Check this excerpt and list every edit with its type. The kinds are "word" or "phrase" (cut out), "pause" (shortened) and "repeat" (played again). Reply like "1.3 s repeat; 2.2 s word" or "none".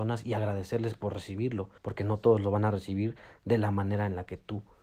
1.8 s pause